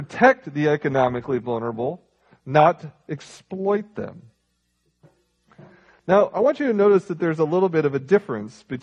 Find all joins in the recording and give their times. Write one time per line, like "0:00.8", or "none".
none